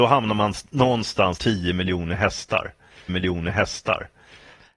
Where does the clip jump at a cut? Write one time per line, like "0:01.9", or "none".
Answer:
0:01.4
0:03.1

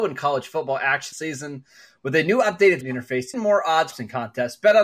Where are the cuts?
0:01.1
0:02.8
0:03.3
0:03.9

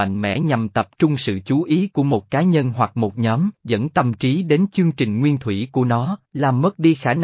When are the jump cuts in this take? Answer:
0:03.5
0:06.2

